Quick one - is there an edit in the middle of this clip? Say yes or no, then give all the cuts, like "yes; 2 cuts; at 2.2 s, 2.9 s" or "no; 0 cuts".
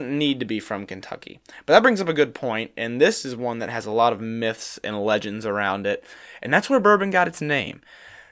no; 0 cuts